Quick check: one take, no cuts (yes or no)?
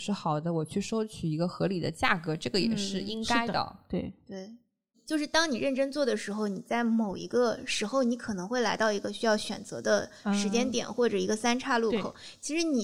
yes